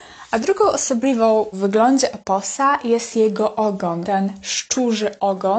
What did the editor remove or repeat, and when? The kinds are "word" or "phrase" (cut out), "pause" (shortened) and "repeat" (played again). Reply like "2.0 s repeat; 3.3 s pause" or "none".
1.5 s word; 4.0 s word